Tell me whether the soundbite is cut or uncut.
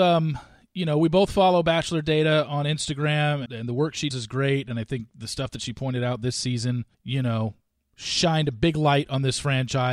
cut